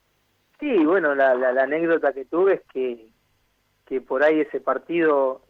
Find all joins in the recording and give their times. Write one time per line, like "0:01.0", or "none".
none